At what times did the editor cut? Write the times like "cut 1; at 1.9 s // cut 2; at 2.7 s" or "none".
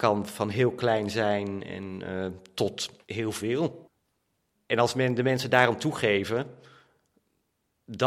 cut 1; at 3.0 s